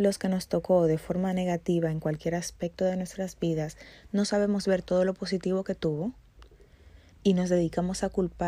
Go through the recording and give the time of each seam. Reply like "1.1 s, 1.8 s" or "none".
7.1 s